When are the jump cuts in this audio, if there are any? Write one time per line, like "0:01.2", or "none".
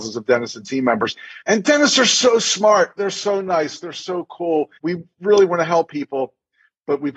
0:01.4
0:04.8